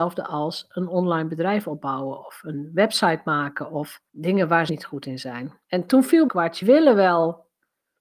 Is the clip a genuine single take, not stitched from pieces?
no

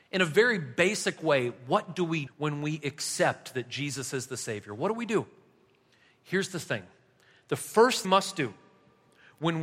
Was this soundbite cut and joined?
yes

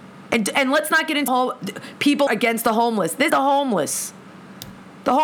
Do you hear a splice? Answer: yes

